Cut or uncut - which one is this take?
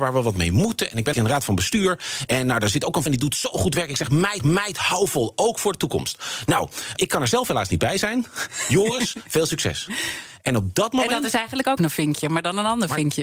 cut